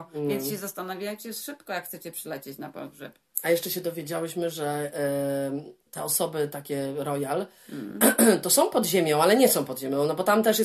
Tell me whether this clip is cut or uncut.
cut